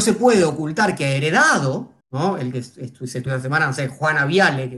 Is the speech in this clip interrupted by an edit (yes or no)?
yes